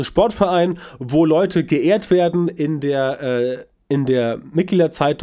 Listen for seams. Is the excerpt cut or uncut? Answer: uncut